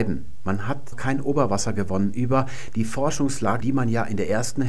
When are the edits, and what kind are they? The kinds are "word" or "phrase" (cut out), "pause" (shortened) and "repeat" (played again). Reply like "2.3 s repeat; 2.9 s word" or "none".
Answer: 0.9 s word; 3.6 s word